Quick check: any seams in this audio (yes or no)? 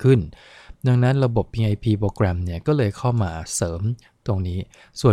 no